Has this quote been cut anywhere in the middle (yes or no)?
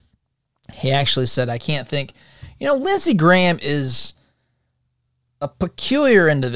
no